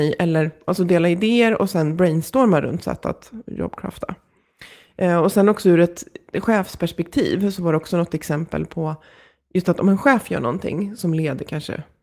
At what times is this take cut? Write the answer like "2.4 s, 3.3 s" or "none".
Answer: none